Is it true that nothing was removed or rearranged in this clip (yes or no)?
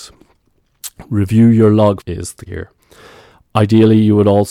no